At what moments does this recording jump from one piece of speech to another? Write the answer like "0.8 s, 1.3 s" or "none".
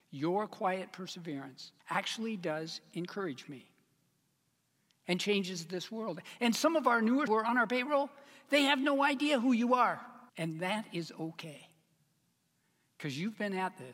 1.8 s, 7.3 s, 10.3 s